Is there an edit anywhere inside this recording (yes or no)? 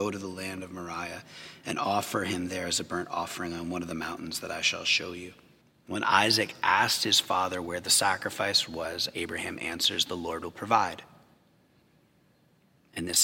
yes